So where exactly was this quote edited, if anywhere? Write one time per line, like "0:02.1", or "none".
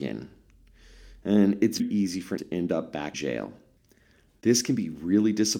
0:01.8
0:02.4
0:03.1